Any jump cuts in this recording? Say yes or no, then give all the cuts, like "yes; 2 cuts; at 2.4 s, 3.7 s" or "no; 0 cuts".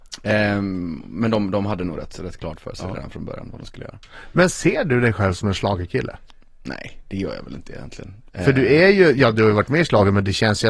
no; 0 cuts